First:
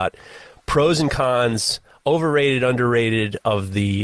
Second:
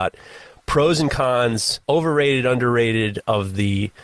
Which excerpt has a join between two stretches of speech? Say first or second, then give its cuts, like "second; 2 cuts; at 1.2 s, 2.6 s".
second; 1 cut; at 1.8 s